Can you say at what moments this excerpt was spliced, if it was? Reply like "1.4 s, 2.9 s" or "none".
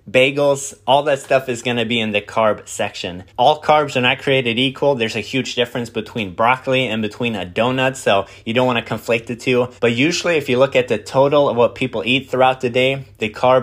3.3 s, 9.8 s